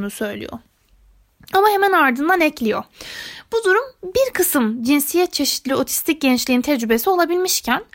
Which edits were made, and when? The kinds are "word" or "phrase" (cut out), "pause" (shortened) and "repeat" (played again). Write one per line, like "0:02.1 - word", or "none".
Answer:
none